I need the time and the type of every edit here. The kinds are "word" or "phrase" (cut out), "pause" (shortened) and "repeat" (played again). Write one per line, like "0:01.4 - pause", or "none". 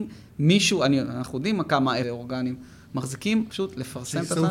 0:02.0 - phrase
0:03.5 - word